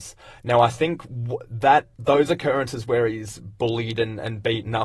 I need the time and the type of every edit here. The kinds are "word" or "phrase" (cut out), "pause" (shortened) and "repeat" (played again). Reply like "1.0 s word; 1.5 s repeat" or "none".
1.9 s pause